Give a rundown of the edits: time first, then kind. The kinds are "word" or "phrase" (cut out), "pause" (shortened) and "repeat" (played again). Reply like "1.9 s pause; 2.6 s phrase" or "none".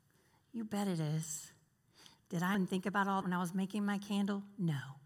2.5 s word; 3.2 s word